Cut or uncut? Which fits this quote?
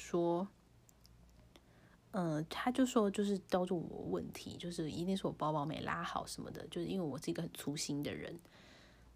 uncut